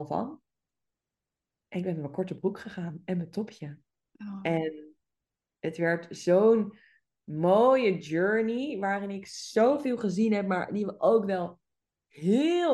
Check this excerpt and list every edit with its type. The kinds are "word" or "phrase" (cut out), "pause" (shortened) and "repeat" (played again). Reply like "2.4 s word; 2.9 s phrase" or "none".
none